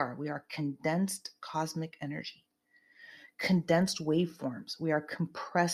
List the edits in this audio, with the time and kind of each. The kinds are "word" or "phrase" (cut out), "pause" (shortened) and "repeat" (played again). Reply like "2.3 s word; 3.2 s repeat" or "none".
none